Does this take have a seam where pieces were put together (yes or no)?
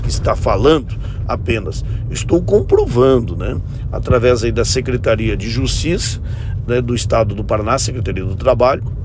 no